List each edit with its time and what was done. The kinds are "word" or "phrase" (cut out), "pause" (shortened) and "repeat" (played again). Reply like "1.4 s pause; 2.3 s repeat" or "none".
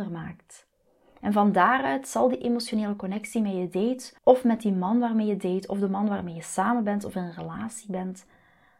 4.2 s pause